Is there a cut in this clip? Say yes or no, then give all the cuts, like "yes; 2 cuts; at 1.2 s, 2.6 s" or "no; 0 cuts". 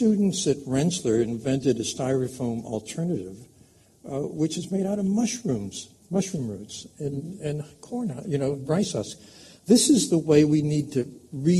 yes; 1 cut; at 6.0 s